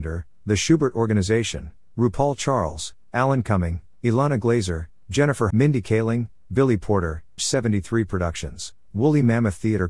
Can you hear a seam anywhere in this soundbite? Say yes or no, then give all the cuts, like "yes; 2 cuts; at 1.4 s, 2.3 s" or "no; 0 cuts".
yes; 2 cuts; at 5.5 s, 7.4 s